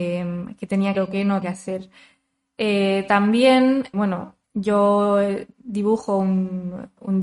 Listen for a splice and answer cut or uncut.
cut